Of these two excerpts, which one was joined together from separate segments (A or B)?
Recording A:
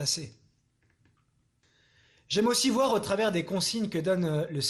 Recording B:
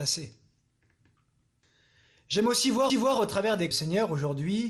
B